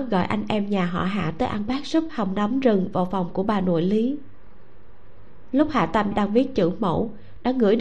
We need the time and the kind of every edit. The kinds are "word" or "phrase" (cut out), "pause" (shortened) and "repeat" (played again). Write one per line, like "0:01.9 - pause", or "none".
0:01.7 - phrase
0:02.1 - word
0:06.1 - word